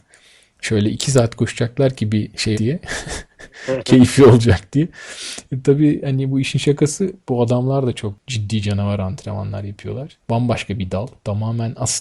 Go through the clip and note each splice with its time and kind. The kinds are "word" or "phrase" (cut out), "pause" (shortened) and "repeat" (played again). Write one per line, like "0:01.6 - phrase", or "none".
0:02.5 - word
0:10.2 - pause